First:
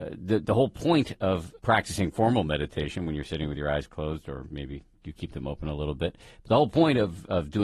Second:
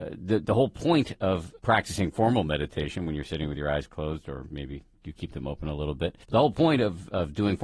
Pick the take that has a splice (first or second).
second